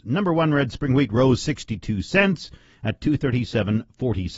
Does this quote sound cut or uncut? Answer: uncut